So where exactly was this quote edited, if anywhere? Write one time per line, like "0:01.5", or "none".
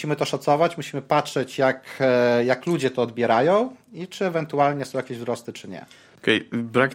none